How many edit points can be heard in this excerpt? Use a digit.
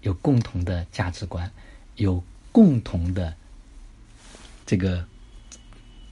1